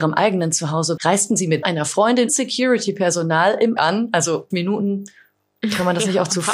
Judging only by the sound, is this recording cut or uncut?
cut